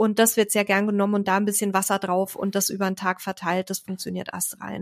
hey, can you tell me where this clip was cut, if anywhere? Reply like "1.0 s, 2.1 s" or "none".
none